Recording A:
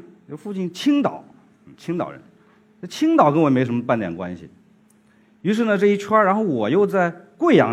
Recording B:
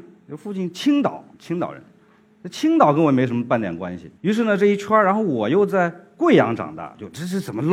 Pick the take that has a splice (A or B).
B